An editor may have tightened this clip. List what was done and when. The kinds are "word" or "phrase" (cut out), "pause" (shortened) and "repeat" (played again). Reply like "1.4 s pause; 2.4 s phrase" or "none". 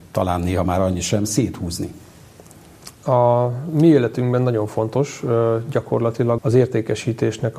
2.9 s pause; 6.4 s word